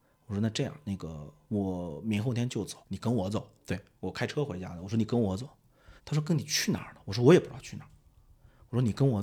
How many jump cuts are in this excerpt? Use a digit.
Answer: 3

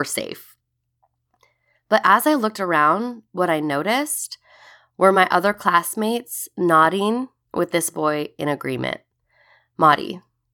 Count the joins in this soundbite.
0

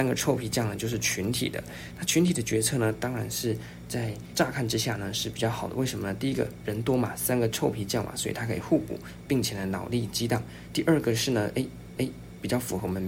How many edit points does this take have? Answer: 1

